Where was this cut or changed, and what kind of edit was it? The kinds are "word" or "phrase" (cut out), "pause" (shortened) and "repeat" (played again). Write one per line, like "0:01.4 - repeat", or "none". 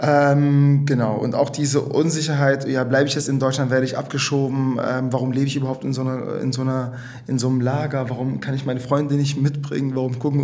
none